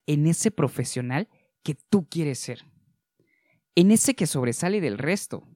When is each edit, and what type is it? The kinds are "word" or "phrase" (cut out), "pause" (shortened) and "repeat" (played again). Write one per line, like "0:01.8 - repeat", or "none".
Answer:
none